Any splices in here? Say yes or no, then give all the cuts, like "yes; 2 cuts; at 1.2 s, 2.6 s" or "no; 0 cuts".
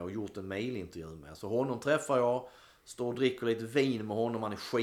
no; 0 cuts